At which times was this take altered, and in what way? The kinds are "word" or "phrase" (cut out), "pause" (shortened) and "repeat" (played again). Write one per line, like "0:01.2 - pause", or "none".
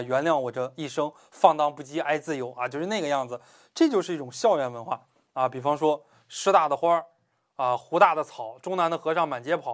none